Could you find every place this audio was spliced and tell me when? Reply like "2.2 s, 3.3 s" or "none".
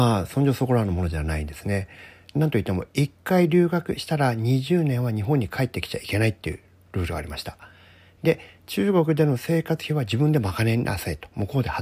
none